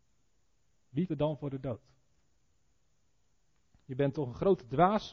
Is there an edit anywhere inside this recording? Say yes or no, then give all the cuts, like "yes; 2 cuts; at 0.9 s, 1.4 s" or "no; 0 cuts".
yes; 1 cut; at 1.1 s